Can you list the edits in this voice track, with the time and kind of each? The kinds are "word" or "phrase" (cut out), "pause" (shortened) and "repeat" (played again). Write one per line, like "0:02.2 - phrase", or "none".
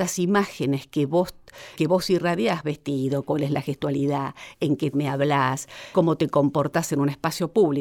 0:01.8 - word
0:02.6 - phrase
0:04.9 - word
0:05.9 - word